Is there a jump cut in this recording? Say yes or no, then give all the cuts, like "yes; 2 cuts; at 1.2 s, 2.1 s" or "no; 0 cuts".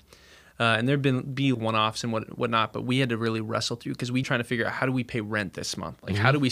yes; 2 cuts; at 1.5 s, 4.2 s